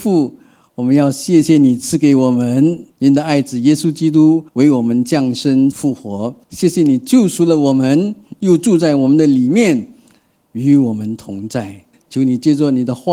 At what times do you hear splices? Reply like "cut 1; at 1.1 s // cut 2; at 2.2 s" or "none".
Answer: cut 1; at 2.9 s // cut 2; at 4.5 s // cut 3; at 5.7 s // cut 4; at 6.4 s // cut 5; at 11.9 s